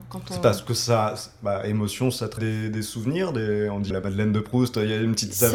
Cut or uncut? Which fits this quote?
cut